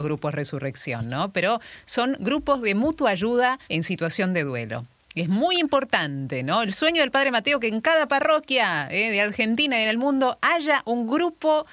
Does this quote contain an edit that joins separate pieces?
yes; 1 cut; at 3.6 s

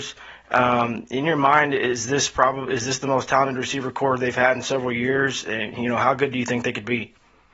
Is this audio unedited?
yes; 0 cuts

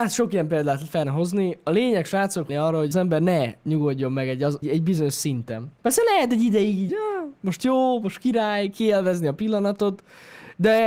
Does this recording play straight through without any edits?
no; 6 cuts; at 1.0 s, 2.5 s, 2.9 s, 4.6 s, 5.8 s, 6.9 s

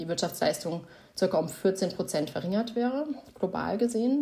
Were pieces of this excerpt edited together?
no; 0 cuts

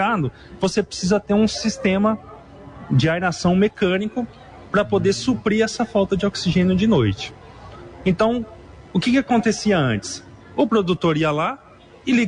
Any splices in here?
no; 0 cuts

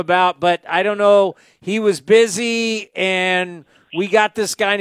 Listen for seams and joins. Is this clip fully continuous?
yes; 0 cuts

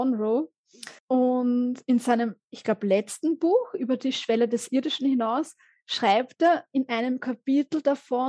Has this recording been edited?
yes; 1 cut; at 1.0 s

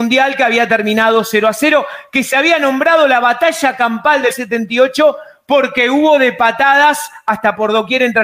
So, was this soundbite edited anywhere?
yes; 1 cut; at 4.3 s

